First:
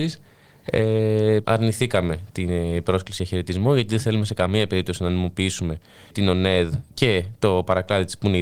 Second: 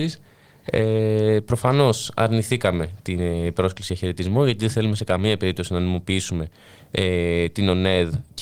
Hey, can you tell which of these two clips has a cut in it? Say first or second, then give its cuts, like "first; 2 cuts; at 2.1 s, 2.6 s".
first; 2 cuts; at 1.4 s, 6.1 s